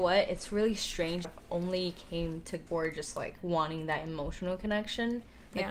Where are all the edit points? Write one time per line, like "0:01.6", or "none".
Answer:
0:01.2
0:02.7